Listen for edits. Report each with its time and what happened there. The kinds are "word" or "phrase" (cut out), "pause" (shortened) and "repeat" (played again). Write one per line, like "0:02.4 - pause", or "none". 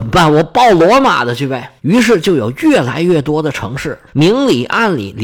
0:01.8 - pause
0:04.1 - pause

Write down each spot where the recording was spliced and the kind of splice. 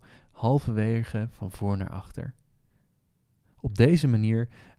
none

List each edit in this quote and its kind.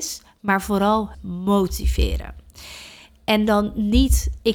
0:01.1 - word

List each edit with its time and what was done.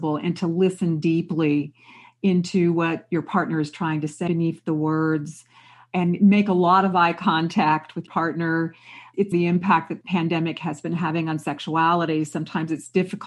0:04.3 - word
0:08.1 - word
0:09.3 - word
0:10.0 - word

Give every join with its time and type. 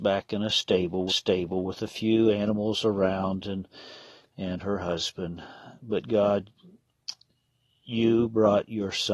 0:01.1 - repeat

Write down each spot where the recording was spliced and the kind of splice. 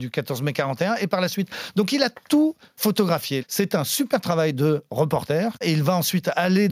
none

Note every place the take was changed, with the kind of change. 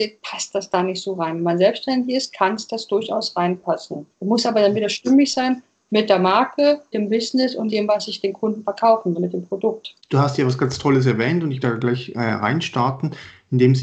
0:04.1 - pause
0:06.9 - word
0:07.7 - word
0:09.2 - word
0:10.0 - pause
0:11.6 - word

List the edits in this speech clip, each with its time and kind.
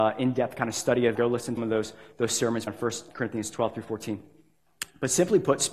0:01.1 - word
0:01.6 - word
0:02.7 - word
0:03.1 - word

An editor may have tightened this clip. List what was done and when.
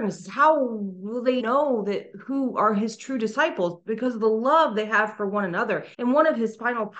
0:01.4 - word
0:05.9 - pause

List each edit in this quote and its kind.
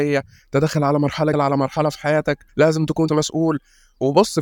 0:01.3 - phrase
0:02.5 - pause
0:03.1 - word

